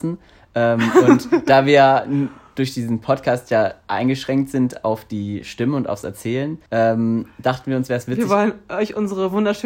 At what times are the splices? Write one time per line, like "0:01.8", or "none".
0:06.7